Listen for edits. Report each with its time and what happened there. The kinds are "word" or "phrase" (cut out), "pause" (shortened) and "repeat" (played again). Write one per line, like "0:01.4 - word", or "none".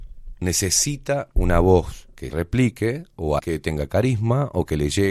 0:02.3 - word
0:03.4 - word